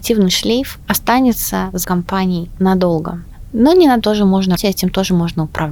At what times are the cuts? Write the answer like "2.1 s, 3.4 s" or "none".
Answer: 1.8 s, 4.0 s, 4.6 s